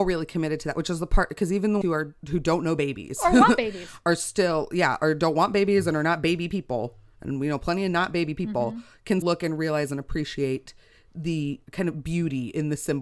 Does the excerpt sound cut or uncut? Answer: cut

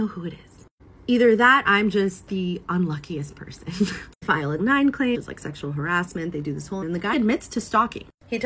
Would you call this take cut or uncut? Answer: cut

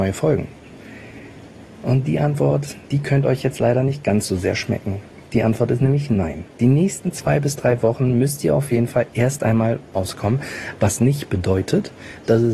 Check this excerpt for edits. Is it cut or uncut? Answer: cut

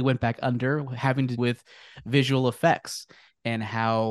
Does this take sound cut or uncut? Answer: cut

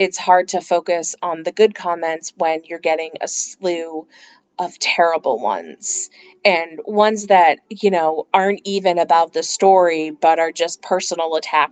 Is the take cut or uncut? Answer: uncut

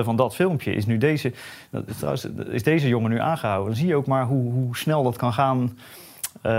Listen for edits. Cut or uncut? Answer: uncut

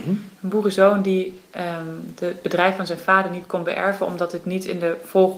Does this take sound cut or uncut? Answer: uncut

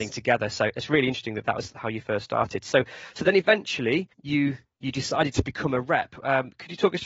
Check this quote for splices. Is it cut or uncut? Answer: uncut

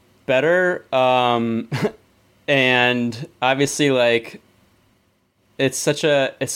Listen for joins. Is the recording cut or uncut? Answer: uncut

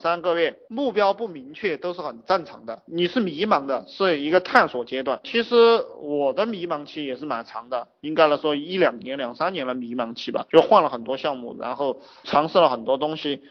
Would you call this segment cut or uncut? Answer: uncut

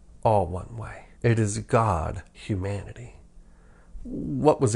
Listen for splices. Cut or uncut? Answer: cut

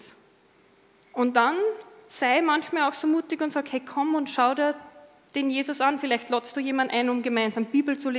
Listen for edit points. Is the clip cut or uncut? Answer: uncut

